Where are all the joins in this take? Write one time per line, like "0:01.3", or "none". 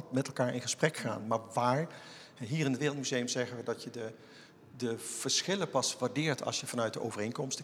none